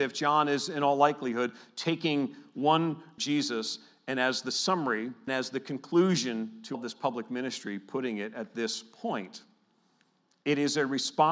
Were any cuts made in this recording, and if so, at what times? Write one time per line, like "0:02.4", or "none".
0:03.2
0:05.3
0:06.7